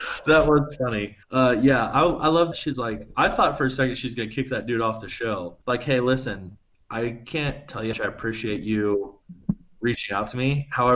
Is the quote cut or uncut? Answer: cut